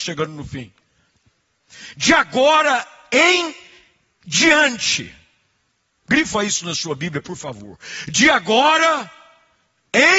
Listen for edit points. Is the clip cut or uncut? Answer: uncut